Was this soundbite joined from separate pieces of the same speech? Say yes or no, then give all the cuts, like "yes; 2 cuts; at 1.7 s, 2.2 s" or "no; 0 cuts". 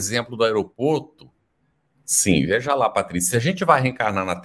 no; 0 cuts